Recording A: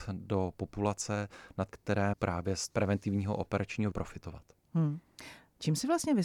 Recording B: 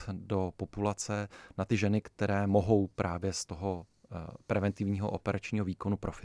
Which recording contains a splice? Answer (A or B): A